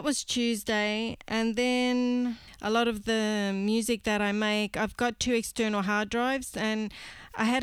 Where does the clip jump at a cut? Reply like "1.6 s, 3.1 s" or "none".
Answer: none